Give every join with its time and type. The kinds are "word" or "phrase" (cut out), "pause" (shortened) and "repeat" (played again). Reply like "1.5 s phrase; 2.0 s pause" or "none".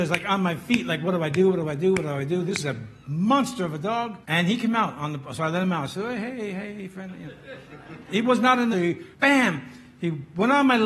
4.2 s pause; 8.7 s phrase; 9.1 s pause